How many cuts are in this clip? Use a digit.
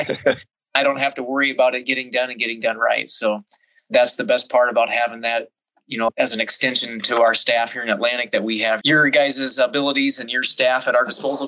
1